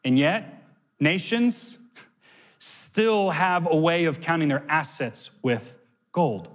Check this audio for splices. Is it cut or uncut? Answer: uncut